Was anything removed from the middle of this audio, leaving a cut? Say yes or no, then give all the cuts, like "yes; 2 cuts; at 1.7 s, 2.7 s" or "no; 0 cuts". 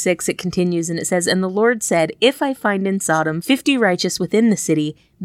no; 0 cuts